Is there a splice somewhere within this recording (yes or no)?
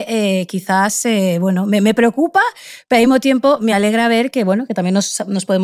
no